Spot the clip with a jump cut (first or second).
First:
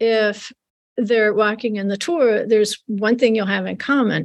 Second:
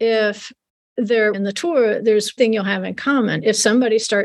second